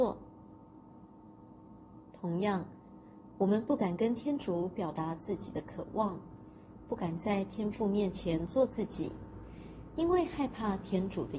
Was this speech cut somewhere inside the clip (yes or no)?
yes